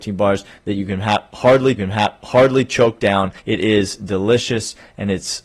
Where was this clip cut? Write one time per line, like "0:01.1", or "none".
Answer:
0:01.8
0:03.4